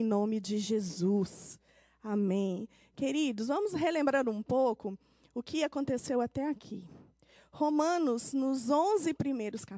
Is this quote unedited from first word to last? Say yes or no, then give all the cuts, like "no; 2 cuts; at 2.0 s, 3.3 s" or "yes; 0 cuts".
yes; 0 cuts